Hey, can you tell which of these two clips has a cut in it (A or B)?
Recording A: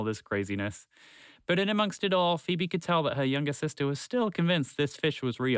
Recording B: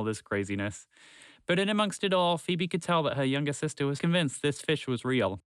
B